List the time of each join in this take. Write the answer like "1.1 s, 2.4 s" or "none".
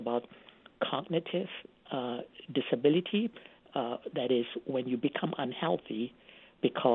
none